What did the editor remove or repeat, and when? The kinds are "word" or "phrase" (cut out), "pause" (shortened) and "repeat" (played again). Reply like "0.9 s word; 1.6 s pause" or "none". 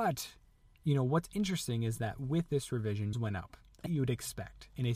3.1 s word; 3.9 s phrase